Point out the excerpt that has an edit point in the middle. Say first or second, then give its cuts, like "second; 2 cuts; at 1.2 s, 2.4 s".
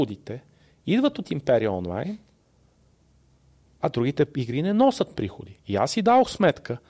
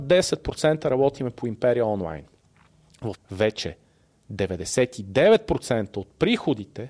second; 1 cut; at 3.1 s